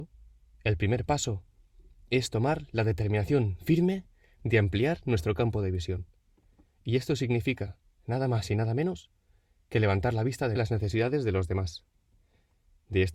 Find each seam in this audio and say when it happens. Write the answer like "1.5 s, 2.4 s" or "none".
10.6 s